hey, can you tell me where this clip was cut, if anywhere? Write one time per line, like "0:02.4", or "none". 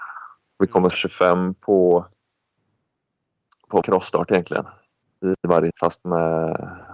0:00.9
0:03.8
0:05.0
0:05.7